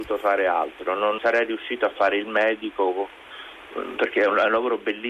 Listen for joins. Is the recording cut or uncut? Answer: cut